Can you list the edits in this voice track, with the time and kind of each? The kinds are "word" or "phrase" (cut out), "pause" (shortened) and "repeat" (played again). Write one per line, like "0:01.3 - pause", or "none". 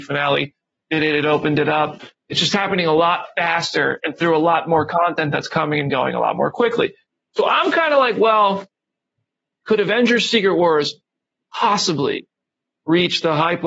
none